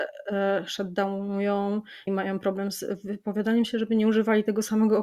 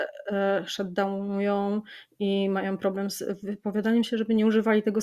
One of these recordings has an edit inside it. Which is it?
first; 1 cut; at 2.1 s

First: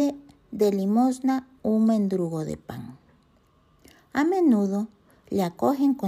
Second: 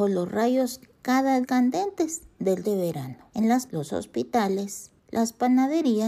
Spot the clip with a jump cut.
second; 5 cuts; at 1.4 s, 2.6 s, 3.3 s, 3.7 s, 5.0 s

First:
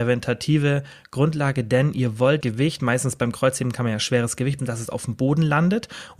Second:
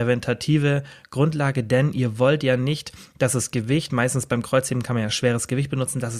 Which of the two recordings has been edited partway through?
first; 2 cuts; at 2.4 s, 4.6 s

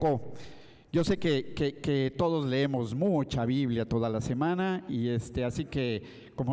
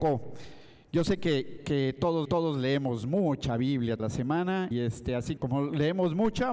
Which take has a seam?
second; 5 cuts; at 1.6 s, 2.2 s, 4.0 s, 4.7 s, 5.4 s

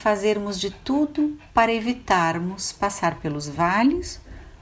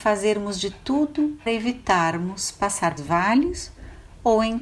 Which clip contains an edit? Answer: second; 2 cuts; at 1.5 s, 3.0 s

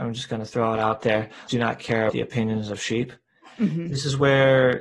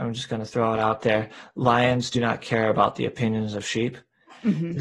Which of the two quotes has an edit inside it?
first; 2 cuts; at 1.5 s, 2.1 s

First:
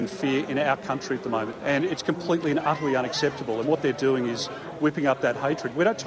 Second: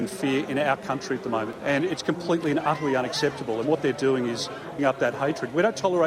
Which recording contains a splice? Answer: second; 1 cut; at 4.8 s

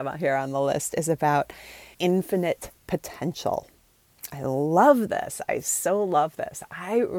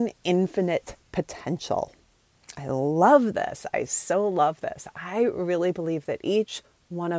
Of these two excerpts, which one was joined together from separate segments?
first; 1 cut; at 1.9 s

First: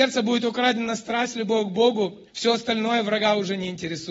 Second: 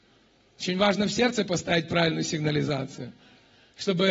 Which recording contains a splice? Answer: first; 1 cut; at 2.3 s

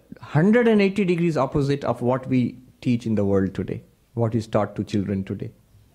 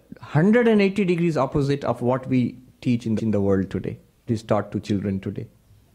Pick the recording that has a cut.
second; 2 cuts; at 3.2 s, 4.3 s

